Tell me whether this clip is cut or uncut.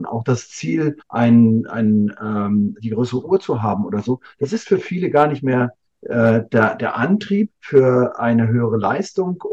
cut